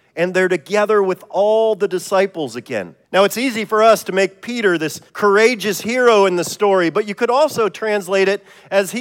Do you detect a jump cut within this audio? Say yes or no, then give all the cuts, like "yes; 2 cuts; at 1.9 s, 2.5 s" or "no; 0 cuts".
yes; 2 cuts; at 3.0 s, 5.1 s